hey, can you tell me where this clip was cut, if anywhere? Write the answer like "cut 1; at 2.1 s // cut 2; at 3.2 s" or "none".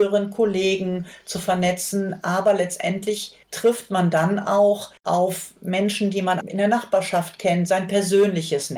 cut 1; at 3.4 s // cut 2; at 5.0 s // cut 3; at 6.4 s